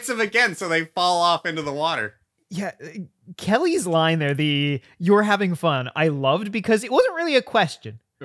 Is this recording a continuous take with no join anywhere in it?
yes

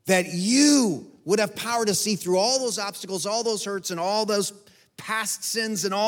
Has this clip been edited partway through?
no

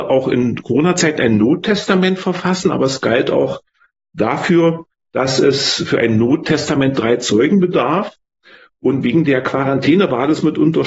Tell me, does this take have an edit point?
no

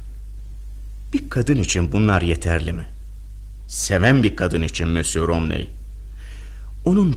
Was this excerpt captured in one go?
yes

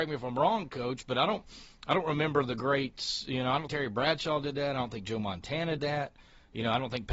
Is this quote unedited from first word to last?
no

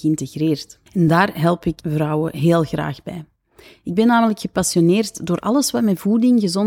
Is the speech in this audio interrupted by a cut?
no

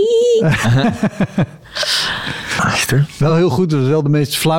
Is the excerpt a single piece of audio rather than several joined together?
yes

